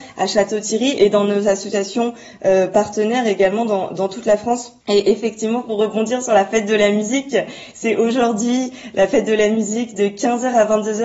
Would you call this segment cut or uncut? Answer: cut